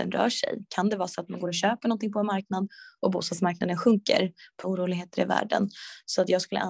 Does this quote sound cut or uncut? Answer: cut